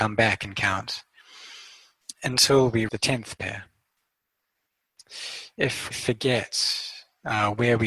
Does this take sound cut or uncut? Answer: cut